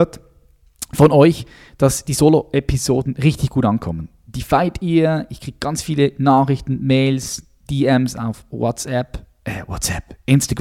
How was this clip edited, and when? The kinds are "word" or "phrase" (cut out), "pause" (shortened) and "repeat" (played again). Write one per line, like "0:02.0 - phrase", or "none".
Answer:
none